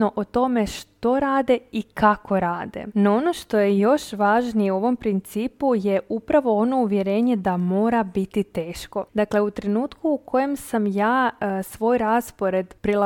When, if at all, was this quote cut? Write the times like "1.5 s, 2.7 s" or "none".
none